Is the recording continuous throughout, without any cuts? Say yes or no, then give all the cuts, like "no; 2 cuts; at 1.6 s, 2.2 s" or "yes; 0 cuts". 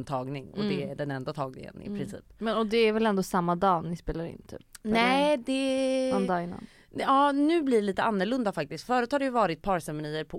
yes; 0 cuts